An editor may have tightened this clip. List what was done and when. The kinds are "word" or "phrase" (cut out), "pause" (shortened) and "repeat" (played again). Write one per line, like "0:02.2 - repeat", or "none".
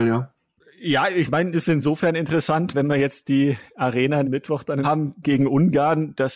0:01.5 - word
0:02.7 - word
0:04.2 - word
0:04.8 - word
0:05.2 - word